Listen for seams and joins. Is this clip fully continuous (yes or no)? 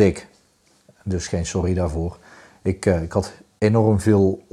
yes